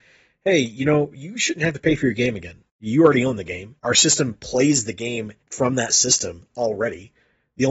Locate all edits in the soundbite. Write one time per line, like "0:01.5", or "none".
0:02.7
0:03.8
0:05.4